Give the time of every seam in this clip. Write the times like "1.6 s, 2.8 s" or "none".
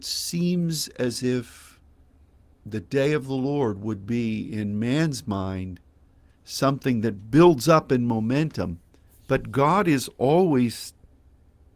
2.4 s, 9.1 s